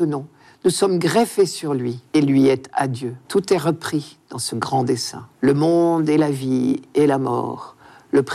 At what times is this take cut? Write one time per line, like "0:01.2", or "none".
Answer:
0:02.1
0:03.2
0:05.3

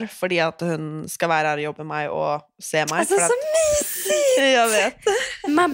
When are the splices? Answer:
0:01.8

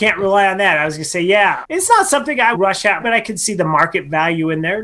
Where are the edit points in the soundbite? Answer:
0:01.6
0:02.5
0:03.0

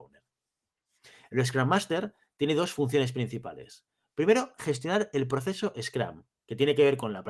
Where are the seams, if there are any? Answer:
none

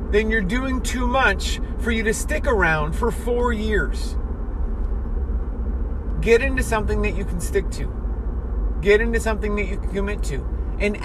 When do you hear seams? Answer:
none

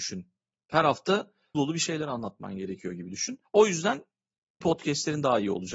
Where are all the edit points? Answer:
0:01.5
0:03.4
0:04.6

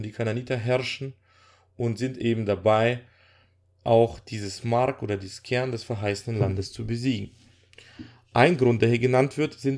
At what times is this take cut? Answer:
none

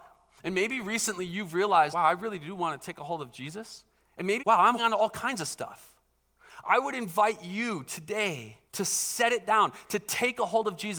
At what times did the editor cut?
0:01.9
0:04.4
0:04.8
0:08.7

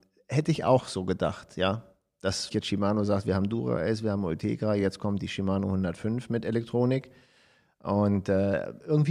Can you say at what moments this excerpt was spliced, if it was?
0:02.5

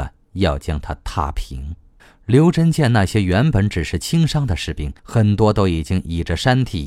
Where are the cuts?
0:02.0
0:05.0

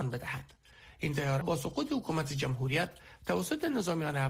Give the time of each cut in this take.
0:01.4

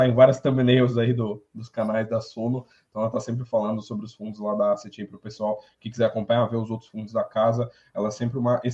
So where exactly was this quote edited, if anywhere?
none

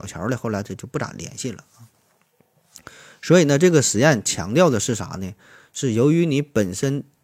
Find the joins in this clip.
none

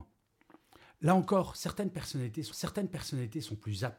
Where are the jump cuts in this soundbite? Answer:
0:02.5

